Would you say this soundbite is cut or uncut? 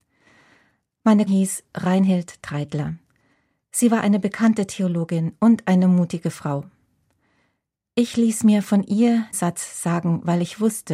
cut